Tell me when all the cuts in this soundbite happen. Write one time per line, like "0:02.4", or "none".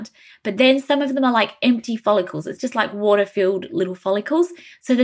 none